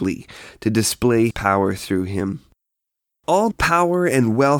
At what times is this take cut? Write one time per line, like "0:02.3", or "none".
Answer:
0:01.3
0:03.5